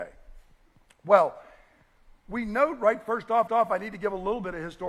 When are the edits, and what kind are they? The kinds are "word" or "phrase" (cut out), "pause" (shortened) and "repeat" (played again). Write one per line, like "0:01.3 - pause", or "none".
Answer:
0:03.5 - repeat

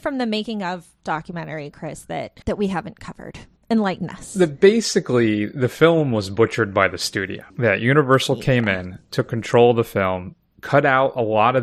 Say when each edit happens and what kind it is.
0:02.4 - pause
0:03.6 - pause
0:07.5 - pause

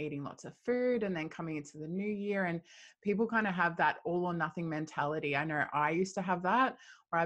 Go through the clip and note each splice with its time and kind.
none

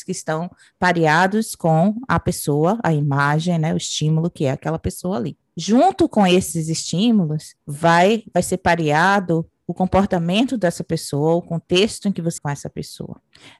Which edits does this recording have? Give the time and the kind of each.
0:05.5 - pause
0:07.6 - pause
0:12.4 - word

